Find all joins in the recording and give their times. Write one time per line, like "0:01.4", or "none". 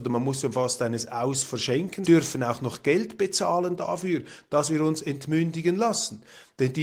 0:02.0